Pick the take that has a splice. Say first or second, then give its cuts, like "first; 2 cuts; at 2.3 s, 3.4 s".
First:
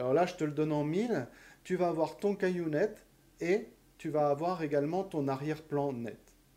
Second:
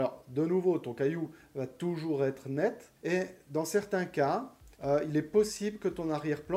second; 2 cuts; at 3.0 s, 4.7 s